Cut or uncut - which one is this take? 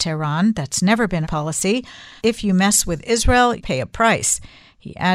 cut